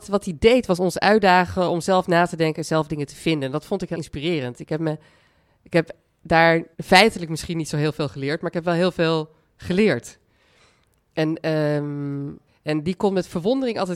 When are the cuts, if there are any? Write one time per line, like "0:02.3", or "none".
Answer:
0:03.9
0:06.7
0:12.5